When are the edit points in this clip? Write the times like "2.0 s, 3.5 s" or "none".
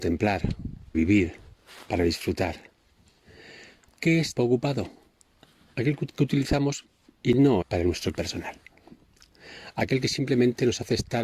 0.9 s, 4.4 s, 7.6 s, 8.1 s